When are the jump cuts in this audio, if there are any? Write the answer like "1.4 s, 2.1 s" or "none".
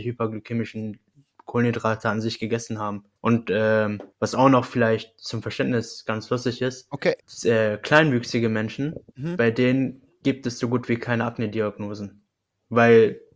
3.2 s, 4.1 s, 7.2 s, 9.1 s

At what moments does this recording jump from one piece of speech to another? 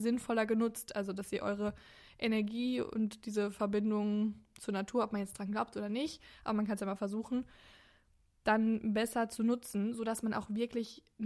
none

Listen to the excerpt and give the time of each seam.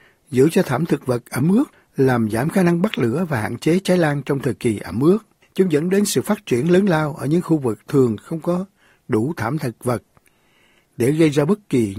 none

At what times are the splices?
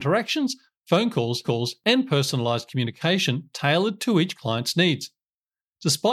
1.4 s

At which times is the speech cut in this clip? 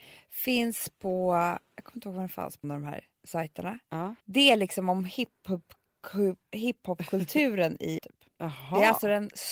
2.6 s, 3.1 s, 4.2 s, 8.0 s

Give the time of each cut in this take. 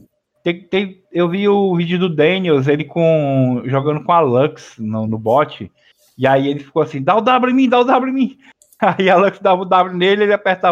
none

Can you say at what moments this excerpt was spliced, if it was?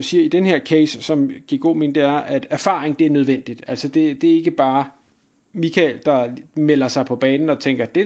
none

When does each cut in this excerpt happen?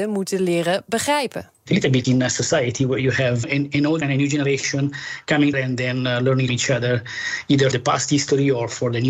2.0 s, 3.4 s, 4.0 s, 5.5 s, 6.5 s, 7.7 s

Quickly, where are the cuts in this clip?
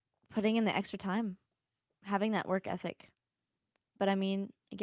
none

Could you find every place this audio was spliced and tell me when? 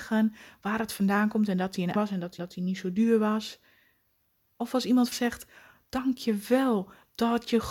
2.0 s, 2.4 s, 5.1 s

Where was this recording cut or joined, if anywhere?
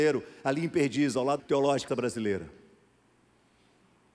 1.4 s, 1.9 s

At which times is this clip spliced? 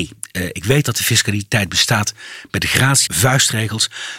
3.1 s

